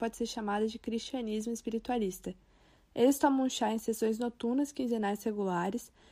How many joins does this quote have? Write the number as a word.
zero